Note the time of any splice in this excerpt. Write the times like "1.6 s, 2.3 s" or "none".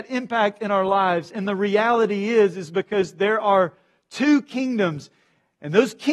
none